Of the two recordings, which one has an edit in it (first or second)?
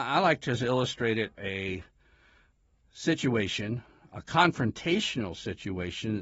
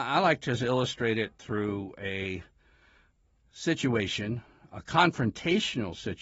first